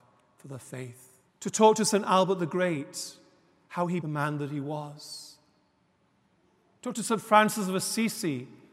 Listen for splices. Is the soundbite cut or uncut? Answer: cut